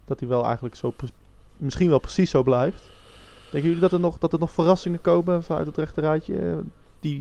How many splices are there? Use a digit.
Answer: 0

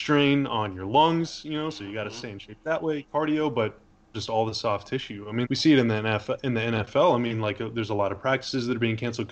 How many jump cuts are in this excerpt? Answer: 2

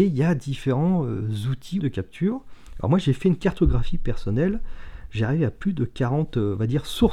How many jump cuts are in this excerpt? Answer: 1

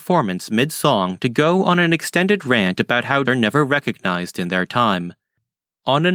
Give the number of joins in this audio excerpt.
1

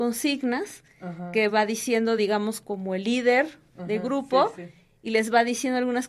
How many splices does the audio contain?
0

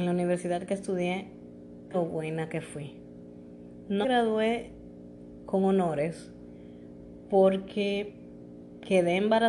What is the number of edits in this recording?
2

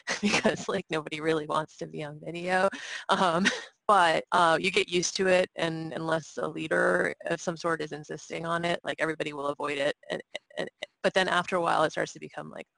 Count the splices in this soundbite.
2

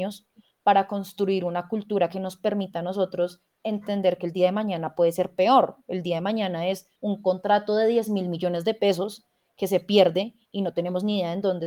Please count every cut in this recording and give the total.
1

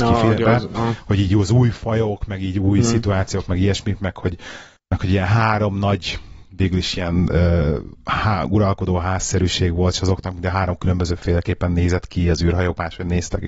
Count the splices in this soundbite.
0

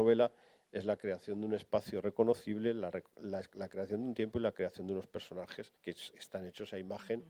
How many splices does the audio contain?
1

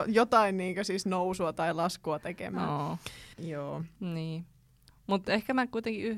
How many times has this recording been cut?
1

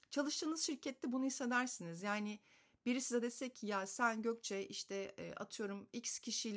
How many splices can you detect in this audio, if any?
0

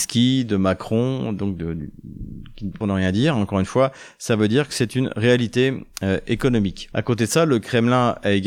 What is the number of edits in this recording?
1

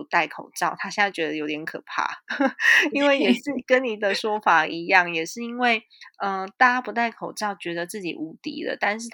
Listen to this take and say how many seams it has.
1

